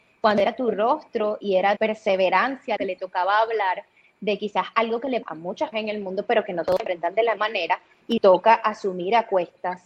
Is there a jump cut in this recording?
yes; 6 cuts; at 1.8 s, 2.8 s, 5.2 s, 5.7 s, 7.4 s, 8.2 s

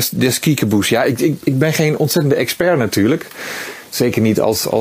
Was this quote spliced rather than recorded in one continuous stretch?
no; 0 cuts

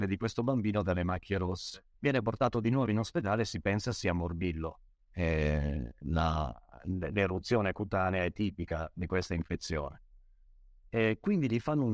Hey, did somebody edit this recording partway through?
yes; 2 cuts; at 1.9 s, 4.9 s

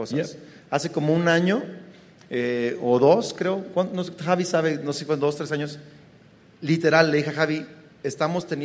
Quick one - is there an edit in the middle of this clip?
no; 0 cuts

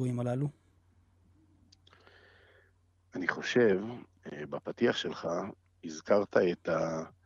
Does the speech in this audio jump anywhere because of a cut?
no; 0 cuts

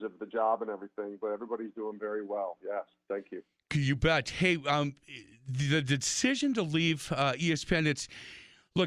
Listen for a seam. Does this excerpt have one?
no; 0 cuts

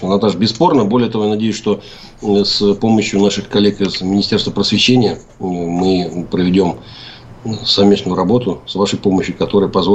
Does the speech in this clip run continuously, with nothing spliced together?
yes; 0 cuts

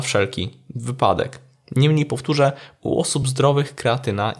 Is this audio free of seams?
yes; 0 cuts

